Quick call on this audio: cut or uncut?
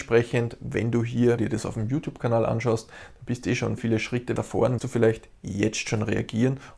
cut